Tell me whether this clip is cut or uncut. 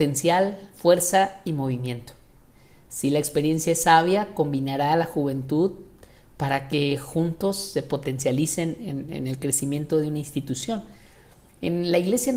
uncut